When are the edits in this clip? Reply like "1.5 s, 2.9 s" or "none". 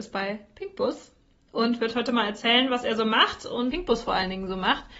none